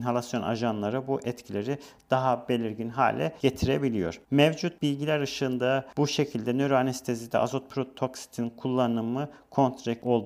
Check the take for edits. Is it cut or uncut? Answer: uncut